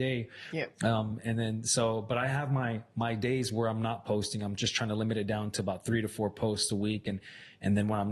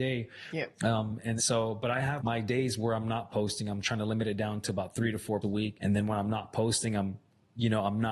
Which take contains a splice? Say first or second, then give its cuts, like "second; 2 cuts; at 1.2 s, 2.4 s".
second; 5 cuts; at 1.4 s, 2.2 s, 3.8 s, 5.4 s, 5.7 s